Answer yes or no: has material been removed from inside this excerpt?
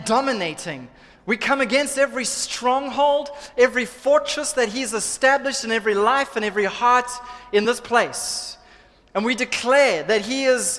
no